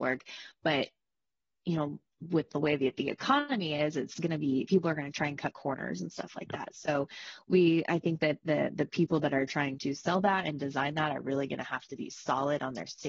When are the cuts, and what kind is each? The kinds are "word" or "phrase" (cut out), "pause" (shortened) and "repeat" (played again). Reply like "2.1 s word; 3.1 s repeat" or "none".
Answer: none